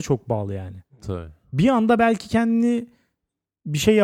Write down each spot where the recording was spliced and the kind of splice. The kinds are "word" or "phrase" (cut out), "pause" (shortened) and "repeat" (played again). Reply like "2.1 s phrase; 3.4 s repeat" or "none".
none